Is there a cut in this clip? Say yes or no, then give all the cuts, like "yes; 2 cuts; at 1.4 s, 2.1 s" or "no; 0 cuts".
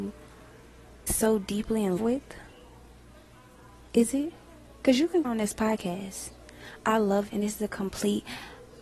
yes; 4 cuts; at 1.1 s, 2.0 s, 5.2 s, 7.3 s